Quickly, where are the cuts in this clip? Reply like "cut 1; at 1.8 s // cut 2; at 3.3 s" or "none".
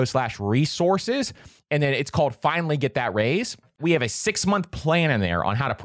none